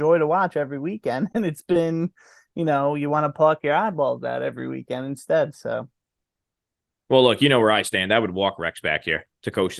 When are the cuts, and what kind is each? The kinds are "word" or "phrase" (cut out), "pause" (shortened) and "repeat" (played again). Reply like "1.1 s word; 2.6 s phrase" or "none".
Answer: none